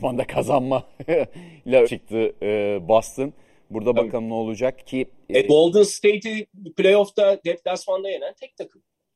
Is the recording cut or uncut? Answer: cut